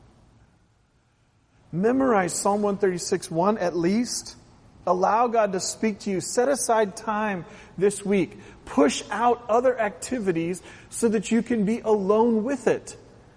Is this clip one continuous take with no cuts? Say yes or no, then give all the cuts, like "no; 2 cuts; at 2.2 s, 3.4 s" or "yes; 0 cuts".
yes; 0 cuts